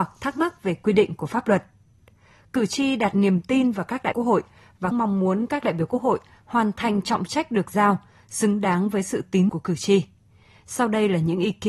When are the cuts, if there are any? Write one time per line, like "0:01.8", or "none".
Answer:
0:04.1
0:04.9
0:09.5